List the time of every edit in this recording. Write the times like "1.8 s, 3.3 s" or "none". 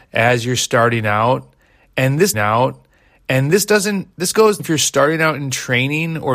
2.3 s, 4.6 s